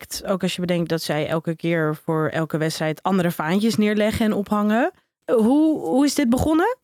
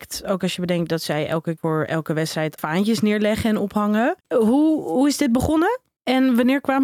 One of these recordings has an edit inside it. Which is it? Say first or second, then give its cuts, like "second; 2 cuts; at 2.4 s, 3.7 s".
second; 3 cuts; at 1.6 s, 2.6 s, 4.2 s